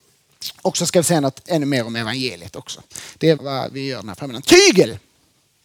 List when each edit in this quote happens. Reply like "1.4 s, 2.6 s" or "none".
3.4 s